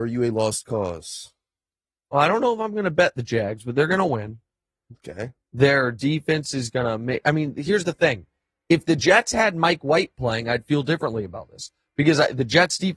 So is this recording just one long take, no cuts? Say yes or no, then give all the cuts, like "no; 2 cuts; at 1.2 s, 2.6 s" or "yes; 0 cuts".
yes; 0 cuts